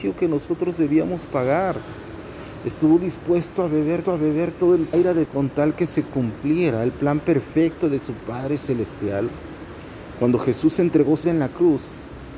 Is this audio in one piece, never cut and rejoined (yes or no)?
no